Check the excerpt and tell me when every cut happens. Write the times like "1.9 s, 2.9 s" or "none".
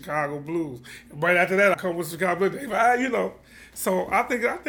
1.7 s

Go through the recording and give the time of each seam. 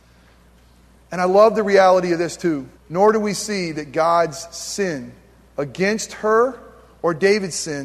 2.8 s

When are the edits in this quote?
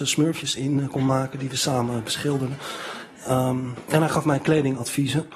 none

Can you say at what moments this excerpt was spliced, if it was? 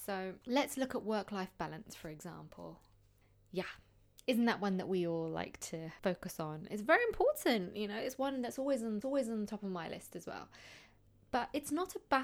9.0 s

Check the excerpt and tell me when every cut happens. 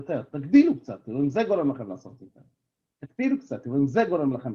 none

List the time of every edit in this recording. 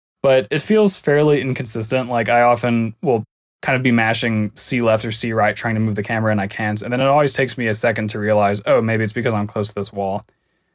none

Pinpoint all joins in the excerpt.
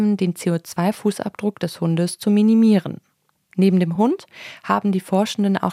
none

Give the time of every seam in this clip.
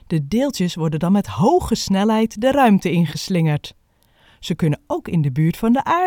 none

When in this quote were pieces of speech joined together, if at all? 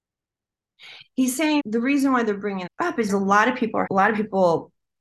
1.6 s, 2.7 s, 3.1 s, 3.9 s

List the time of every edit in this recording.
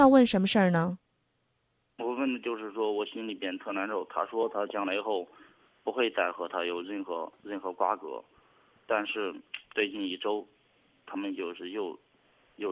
9.6 s

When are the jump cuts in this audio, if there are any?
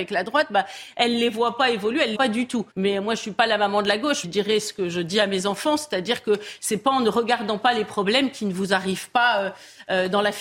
2.1 s, 2.7 s, 4.2 s

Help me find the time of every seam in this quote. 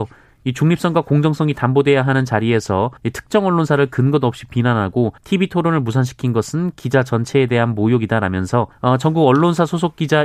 3.0 s, 5.2 s, 8.7 s

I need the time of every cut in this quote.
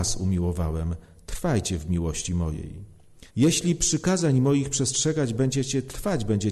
3.3 s

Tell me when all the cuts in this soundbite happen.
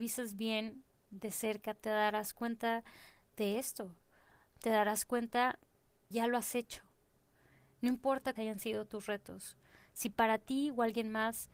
6.1 s, 8.4 s

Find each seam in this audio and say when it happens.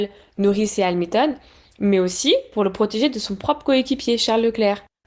none

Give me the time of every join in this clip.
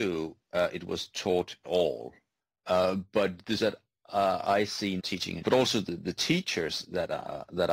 1.6 s, 2.4 s, 3.6 s, 5.0 s, 5.4 s

